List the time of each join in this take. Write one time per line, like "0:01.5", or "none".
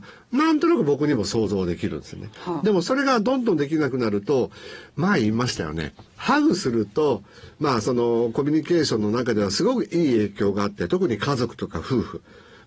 0:06.1